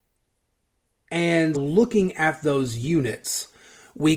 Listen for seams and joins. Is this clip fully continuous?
no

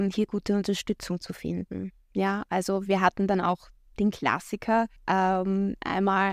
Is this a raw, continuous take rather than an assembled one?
no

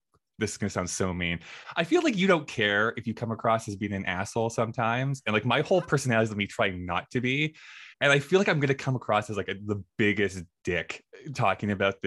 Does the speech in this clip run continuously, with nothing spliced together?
no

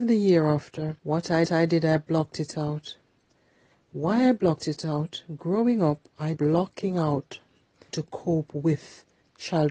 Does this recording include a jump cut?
yes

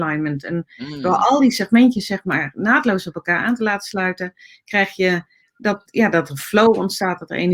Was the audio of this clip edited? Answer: no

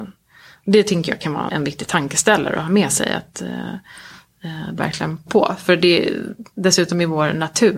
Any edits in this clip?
yes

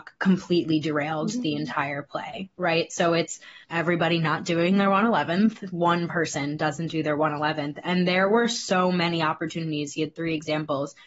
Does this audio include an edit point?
yes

